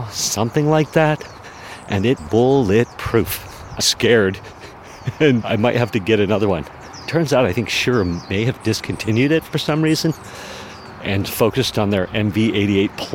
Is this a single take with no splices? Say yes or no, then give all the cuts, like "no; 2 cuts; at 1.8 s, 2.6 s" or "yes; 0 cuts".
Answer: no; 3 cuts; at 2.2 s, 3.8 s, 5.4 s